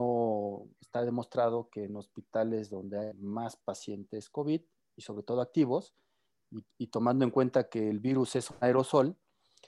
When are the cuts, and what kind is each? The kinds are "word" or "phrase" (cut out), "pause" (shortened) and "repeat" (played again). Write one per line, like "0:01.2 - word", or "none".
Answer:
none